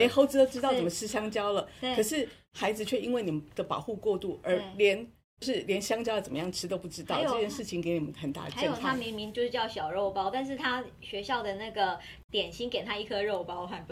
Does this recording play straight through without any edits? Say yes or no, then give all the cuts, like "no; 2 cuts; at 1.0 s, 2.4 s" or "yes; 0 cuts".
no; 1 cut; at 5.4 s